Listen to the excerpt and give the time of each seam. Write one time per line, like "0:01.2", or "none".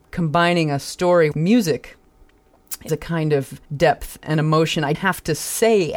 0:01.3
0:02.9
0:03.6
0:04.9